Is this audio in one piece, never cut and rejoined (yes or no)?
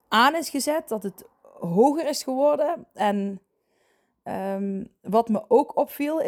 yes